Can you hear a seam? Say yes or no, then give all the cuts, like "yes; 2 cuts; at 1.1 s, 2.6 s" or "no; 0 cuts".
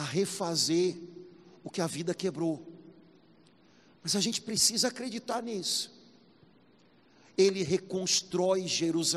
no; 0 cuts